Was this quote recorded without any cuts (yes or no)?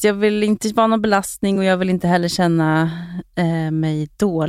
yes